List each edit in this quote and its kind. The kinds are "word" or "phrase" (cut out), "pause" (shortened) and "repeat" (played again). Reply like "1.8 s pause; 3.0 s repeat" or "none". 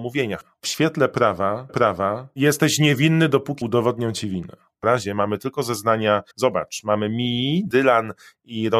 1.7 s repeat; 3.6 s word; 4.8 s word; 6.3 s pause